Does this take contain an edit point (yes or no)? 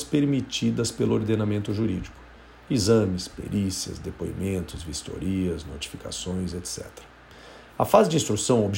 no